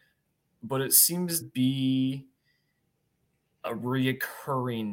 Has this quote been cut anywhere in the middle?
yes; 1 cut; at 1.4 s

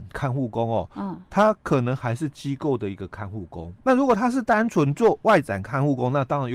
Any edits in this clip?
yes; 1 cut; at 3.8 s

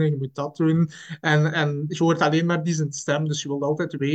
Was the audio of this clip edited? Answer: no; 0 cuts

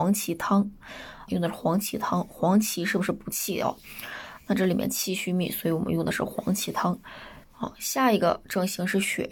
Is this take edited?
yes; 2 cuts; at 1.3 s, 7.4 s

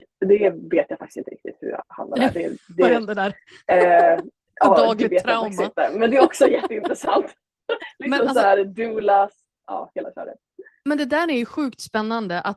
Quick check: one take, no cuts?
no; 2 cuts; at 7.8 s, 9.6 s

